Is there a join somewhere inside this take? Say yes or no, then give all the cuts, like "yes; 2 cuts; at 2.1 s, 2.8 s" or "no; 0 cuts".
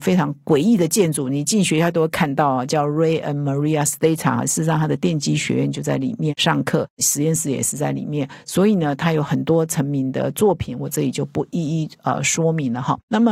no; 0 cuts